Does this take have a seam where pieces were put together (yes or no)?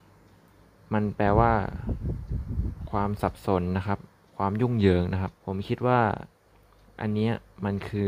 yes